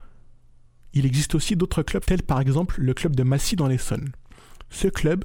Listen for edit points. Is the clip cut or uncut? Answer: cut